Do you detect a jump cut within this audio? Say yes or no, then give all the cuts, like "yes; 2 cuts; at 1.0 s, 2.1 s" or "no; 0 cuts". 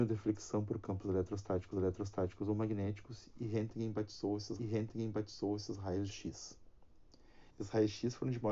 yes; 4 cuts; at 1.7 s, 4.6 s, 6.1 s, 7.5 s